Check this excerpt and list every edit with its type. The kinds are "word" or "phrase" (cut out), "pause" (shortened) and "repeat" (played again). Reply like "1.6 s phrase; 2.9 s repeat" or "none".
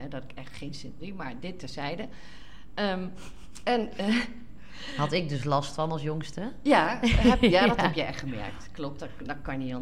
1.0 s phrase